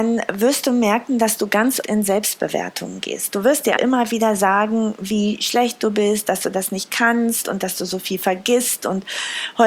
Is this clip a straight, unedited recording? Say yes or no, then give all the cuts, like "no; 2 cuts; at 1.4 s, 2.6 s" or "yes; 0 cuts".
no; 2 cuts; at 1.8 s, 3.8 s